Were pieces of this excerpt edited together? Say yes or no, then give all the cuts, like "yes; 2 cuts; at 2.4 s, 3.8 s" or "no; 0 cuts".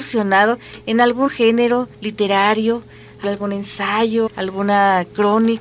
yes; 4 cuts; at 1.3 s, 1.9 s, 3.2 s, 4.3 s